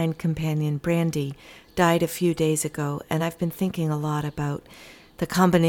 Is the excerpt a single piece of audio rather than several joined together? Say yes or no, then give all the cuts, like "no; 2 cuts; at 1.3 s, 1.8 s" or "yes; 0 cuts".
yes; 0 cuts